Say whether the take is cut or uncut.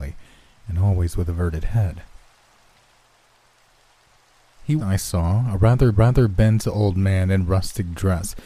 cut